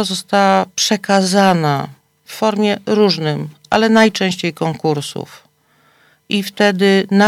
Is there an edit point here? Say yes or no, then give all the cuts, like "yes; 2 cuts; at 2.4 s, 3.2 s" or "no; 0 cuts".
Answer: no; 0 cuts